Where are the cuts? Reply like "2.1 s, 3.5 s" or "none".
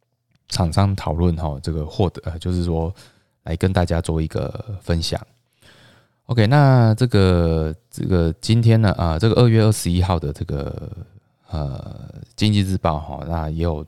none